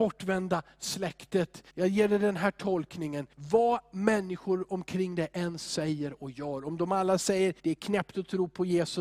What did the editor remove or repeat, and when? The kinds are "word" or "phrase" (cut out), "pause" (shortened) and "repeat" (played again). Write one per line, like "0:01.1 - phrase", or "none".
0:01.7 - pause
0:03.3 - pause
0:07.6 - pause